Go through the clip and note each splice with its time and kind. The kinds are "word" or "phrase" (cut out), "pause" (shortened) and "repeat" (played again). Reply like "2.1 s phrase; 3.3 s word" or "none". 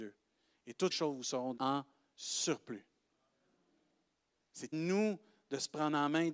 0.9 s word; 1.6 s word; 4.7 s word